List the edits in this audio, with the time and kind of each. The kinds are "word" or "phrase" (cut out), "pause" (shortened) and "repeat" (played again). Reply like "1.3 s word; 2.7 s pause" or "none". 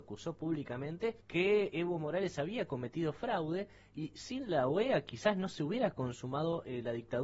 1.2 s pause